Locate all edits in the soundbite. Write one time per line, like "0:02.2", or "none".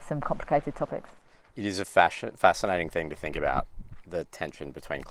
none